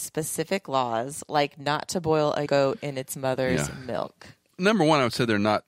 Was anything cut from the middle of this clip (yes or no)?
yes